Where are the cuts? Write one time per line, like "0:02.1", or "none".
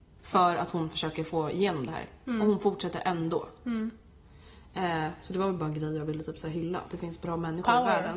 none